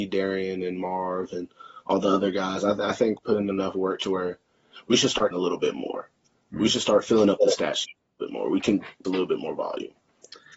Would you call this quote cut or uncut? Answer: cut